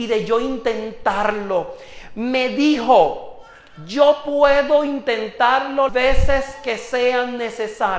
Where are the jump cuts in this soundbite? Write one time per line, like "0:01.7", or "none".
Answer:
0:05.9